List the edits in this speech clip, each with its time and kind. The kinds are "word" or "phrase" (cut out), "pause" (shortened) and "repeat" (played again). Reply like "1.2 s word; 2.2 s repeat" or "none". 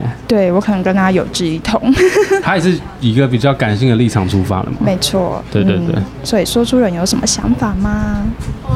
2.4 s word